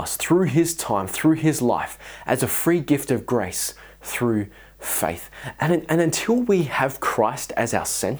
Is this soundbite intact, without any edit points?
yes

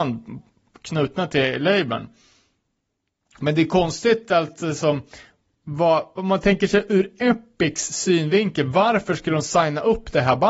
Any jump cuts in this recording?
no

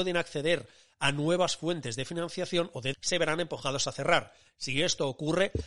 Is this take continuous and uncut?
no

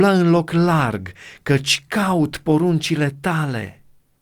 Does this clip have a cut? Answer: no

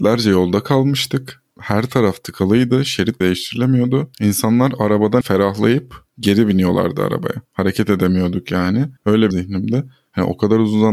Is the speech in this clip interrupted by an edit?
yes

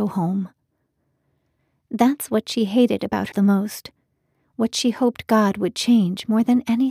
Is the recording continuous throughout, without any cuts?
no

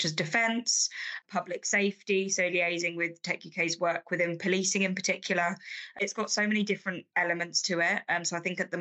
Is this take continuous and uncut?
yes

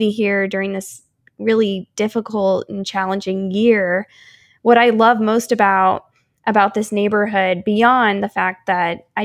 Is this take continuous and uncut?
yes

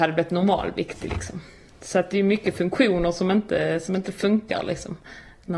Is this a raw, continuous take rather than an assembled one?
yes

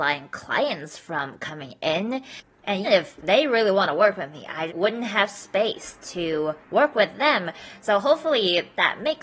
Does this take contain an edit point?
yes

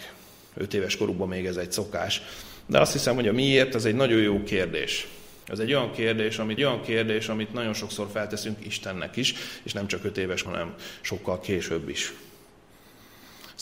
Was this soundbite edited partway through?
yes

